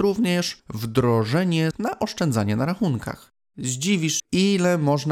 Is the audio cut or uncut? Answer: cut